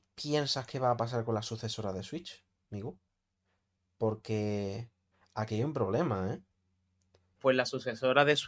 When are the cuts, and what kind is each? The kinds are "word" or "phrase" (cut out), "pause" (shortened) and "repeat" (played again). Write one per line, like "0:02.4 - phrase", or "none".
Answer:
none